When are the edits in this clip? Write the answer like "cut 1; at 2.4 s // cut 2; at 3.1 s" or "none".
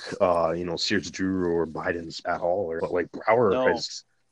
cut 1; at 2.2 s // cut 2; at 2.8 s